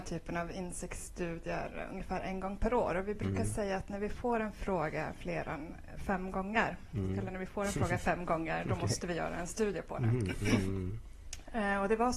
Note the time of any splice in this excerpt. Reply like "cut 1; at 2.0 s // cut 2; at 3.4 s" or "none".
none